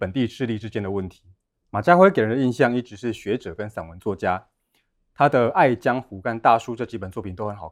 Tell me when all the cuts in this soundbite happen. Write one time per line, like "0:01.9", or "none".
none